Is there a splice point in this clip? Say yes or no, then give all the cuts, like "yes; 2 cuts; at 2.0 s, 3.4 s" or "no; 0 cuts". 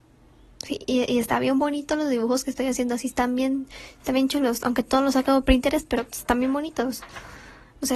no; 0 cuts